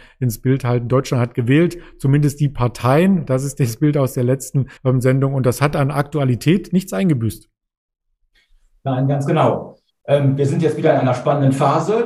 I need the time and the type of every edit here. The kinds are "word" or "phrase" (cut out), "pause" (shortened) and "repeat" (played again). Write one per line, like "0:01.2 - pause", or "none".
0:04.8 - pause
0:09.9 - pause